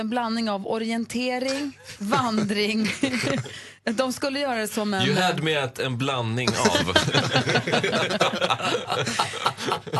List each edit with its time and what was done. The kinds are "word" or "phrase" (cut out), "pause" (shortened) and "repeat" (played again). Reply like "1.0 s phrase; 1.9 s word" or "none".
none

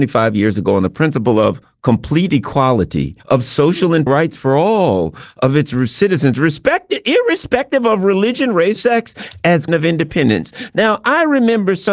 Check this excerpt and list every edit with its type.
3.2 s pause; 4.1 s word; 8.8 s word; 9.7 s phrase

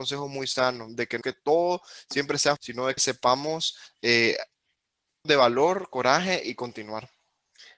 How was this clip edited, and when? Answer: 1.2 s word; 2.6 s word; 3.0 s word; 5.2 s word

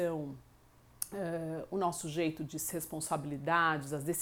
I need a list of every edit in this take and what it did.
2.7 s phrase

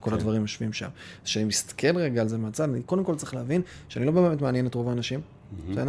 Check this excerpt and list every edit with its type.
none

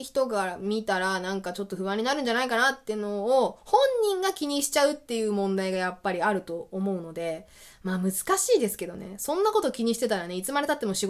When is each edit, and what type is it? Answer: none

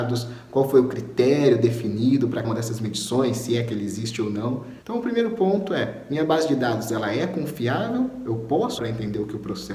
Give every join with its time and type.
2.4 s word; 4.8 s pause; 8.8 s word

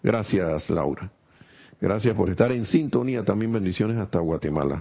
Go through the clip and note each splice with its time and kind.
none

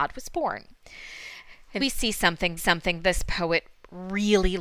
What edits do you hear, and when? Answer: 1.8 s word; 2.6 s repeat

